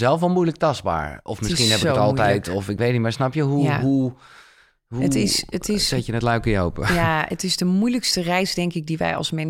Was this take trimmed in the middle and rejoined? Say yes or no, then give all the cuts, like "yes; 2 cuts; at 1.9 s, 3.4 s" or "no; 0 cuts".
no; 0 cuts